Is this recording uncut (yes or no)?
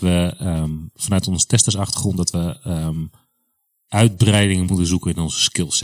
yes